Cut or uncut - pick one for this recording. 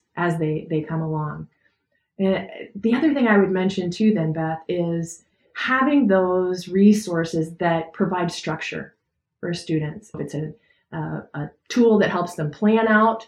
cut